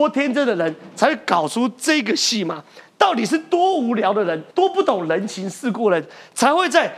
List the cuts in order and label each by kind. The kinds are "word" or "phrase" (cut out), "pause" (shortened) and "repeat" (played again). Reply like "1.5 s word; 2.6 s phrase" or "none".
4.5 s pause